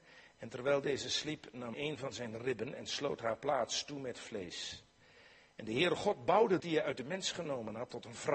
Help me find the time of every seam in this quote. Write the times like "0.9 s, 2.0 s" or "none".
1.7 s, 6.6 s